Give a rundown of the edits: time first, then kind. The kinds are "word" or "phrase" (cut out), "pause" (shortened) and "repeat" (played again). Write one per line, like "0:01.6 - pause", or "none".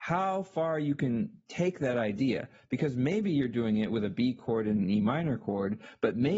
none